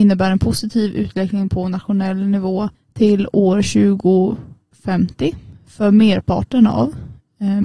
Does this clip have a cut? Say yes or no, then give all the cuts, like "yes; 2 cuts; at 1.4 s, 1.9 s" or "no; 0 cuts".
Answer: yes; 1 cut; at 2.7 s